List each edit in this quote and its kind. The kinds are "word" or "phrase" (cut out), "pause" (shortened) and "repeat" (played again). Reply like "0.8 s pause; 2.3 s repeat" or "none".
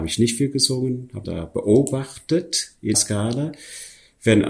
1.2 s phrase; 2.9 s word